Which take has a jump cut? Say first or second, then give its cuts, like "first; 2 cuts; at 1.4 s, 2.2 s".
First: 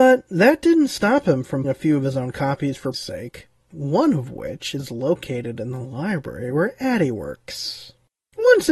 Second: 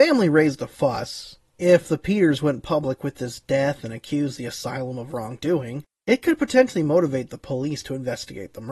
first; 2 cuts; at 1.6 s, 2.9 s